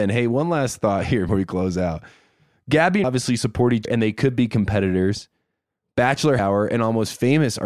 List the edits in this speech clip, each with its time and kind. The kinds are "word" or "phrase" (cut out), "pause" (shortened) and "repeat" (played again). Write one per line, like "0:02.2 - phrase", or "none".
0:01.3 - word
0:03.0 - word
0:03.8 - word
0:06.4 - word